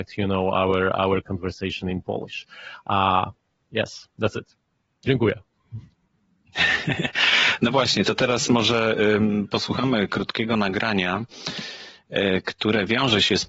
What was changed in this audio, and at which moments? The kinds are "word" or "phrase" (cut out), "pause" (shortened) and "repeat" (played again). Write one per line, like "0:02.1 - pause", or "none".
none